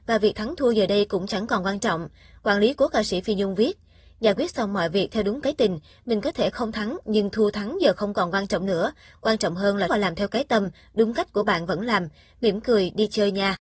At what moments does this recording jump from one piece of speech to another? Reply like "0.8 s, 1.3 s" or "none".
9.9 s